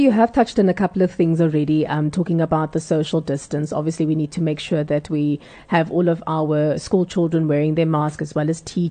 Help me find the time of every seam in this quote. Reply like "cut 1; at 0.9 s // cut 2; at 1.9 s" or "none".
none